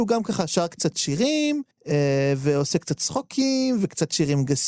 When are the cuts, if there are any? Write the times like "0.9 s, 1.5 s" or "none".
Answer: 1.7 s